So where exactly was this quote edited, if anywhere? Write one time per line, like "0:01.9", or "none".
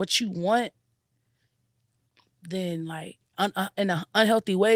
none